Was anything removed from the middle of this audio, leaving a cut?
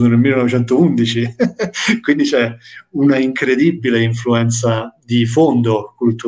no; 0 cuts

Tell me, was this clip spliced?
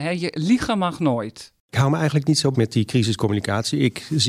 yes; 1 cut; at 2.5 s

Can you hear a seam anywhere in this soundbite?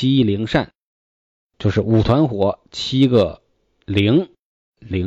no; 0 cuts

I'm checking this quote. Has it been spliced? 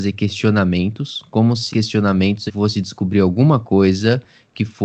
yes; 2 cuts; at 1.7 s, 2.5 s

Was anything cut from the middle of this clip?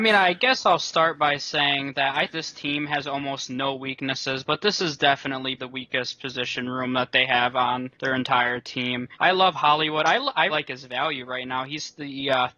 yes; 5 cuts; at 2.3 s, 5.6 s, 7.9 s, 9.1 s, 10.5 s

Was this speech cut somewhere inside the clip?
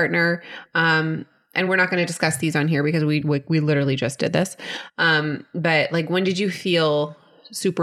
no; 0 cuts

